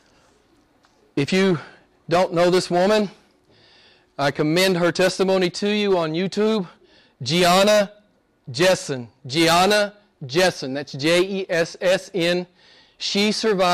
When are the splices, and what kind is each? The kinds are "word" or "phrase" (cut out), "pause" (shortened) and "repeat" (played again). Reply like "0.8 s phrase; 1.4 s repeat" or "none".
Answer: none